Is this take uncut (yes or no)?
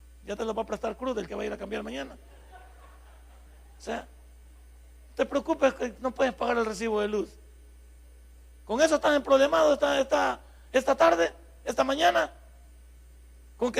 no